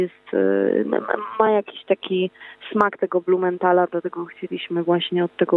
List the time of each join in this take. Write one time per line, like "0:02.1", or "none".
none